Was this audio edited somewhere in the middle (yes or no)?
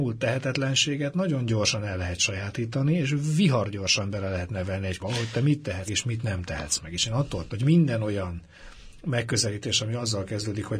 yes